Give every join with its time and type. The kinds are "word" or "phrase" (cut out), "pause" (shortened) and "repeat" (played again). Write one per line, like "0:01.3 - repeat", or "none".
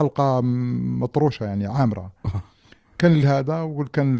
none